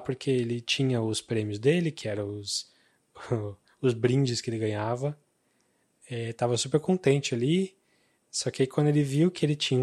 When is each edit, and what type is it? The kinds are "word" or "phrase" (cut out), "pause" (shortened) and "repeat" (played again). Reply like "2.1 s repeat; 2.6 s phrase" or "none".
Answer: none